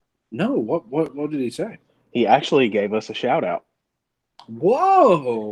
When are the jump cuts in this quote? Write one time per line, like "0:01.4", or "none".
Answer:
none